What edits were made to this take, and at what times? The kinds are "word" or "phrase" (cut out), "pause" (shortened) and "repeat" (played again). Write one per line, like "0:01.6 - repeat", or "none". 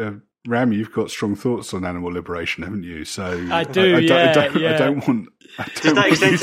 none